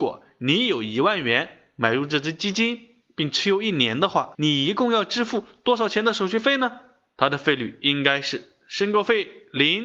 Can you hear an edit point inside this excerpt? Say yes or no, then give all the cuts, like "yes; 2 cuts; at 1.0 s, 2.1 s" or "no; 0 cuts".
no; 0 cuts